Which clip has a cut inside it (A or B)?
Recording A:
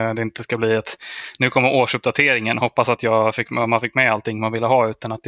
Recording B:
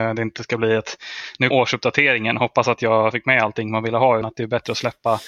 B